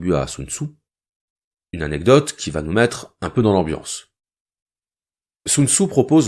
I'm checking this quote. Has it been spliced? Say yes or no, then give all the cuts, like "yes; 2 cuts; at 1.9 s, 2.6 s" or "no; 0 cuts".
no; 0 cuts